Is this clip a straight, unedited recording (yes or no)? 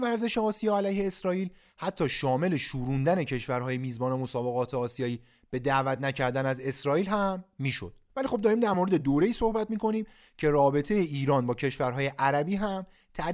yes